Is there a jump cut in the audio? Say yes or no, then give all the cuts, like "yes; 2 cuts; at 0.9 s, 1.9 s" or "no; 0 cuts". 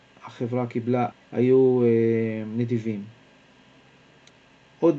yes; 1 cut; at 1.1 s